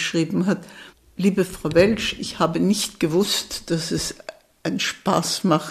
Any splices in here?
no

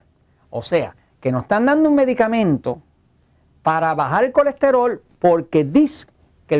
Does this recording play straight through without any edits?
yes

